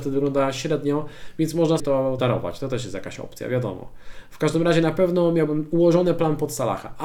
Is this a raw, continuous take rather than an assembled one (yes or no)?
no